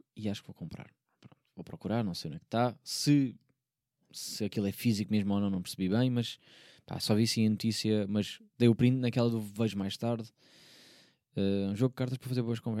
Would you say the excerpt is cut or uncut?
uncut